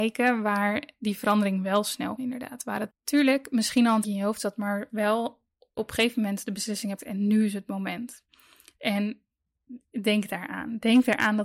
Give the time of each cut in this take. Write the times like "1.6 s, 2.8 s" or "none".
2.2 s, 2.9 s, 4.0 s, 5.8 s, 7.0 s